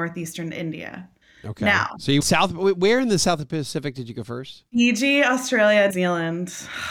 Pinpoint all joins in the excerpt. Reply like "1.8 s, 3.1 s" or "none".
1.2 s, 2.2 s, 5.9 s